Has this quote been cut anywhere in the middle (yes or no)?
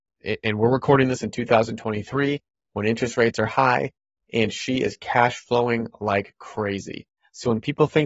no